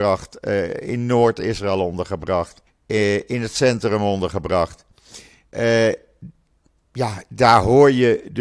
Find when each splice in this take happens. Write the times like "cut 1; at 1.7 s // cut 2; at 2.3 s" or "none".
cut 1; at 2.7 s

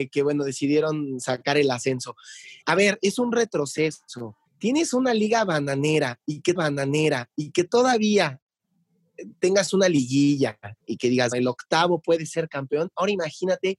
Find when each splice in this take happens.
cut 1; at 2.6 s // cut 2; at 4.5 s // cut 3; at 6.6 s // cut 4; at 10.8 s // cut 5; at 11.3 s

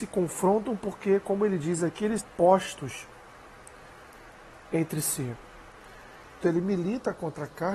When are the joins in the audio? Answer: cut 1; at 2.2 s // cut 2; at 6.4 s

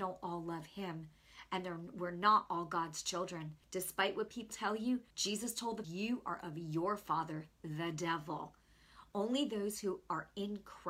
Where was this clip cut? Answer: cut 1; at 3.6 s // cut 2; at 4.5 s // cut 3; at 5.1 s // cut 4; at 5.8 s

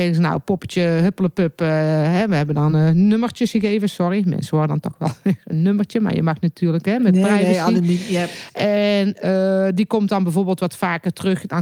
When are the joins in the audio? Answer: none

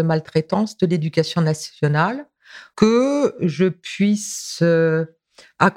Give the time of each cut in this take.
cut 1; at 2.7 s // cut 2; at 3.4 s

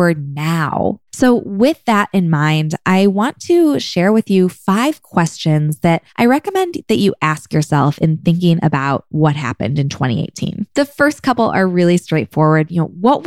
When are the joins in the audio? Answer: cut 1; at 1.1 s // cut 2; at 6.1 s // cut 3; at 10.7 s

